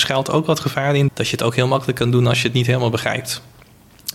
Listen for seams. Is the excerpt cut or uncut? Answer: cut